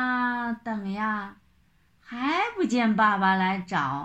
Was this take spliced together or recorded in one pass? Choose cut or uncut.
uncut